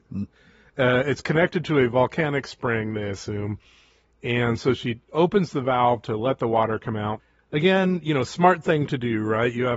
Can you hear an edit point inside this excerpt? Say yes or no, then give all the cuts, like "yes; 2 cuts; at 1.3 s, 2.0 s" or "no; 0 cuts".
no; 0 cuts